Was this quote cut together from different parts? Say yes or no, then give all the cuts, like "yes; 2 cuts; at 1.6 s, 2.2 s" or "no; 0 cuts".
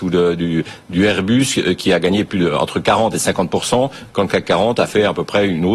no; 0 cuts